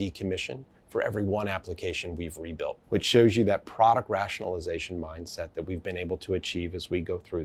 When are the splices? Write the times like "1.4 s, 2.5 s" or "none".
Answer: 2.8 s